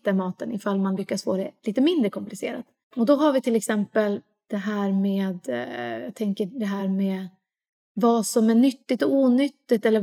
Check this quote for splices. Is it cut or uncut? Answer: uncut